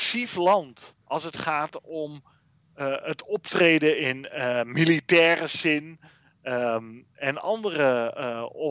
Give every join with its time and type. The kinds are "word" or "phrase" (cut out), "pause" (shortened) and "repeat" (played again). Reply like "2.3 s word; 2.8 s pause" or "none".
1.0 s pause